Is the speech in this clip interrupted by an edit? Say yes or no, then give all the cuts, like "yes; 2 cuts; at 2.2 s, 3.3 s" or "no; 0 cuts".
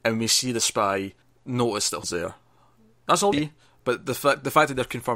yes; 3 cuts; at 1.2 s, 2.0 s, 3.3 s